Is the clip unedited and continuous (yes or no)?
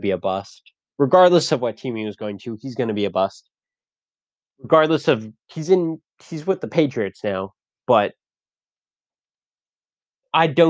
yes